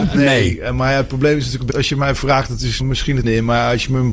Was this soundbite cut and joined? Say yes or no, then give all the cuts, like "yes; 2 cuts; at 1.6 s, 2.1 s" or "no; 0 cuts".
yes; 3 cuts; at 1.7 s, 2.8 s, 3.2 s